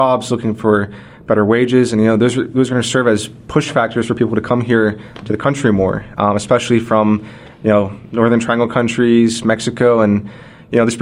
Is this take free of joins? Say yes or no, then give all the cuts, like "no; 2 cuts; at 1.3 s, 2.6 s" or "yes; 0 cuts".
yes; 0 cuts